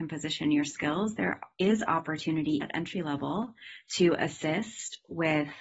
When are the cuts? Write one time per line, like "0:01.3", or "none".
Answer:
0:02.6